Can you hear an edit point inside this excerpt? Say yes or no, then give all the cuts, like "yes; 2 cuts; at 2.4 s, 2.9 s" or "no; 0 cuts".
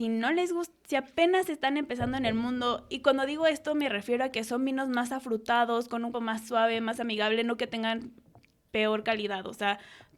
yes; 1 cut; at 6.1 s